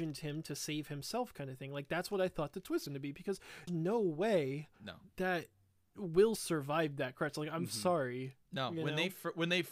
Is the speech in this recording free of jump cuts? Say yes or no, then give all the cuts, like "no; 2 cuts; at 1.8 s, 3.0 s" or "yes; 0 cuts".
no; 5 cuts; at 2.9 s, 3.7 s, 4.7 s, 6.4 s, 8.4 s